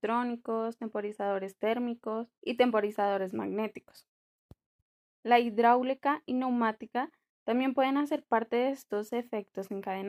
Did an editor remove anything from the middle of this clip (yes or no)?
yes